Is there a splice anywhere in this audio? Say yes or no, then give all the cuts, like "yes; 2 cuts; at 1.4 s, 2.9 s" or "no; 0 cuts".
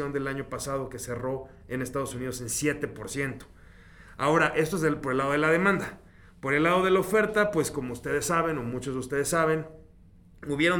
no; 0 cuts